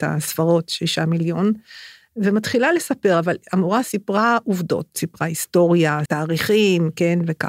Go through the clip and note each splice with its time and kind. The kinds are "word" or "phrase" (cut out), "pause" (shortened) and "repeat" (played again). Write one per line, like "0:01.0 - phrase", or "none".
0:03.8 - word
0:06.1 - word